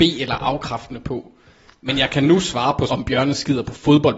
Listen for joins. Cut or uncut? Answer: cut